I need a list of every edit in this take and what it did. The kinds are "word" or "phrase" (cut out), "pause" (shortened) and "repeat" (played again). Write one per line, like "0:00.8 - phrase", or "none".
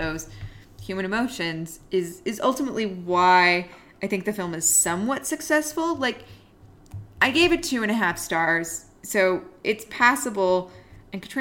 0:07.1 - pause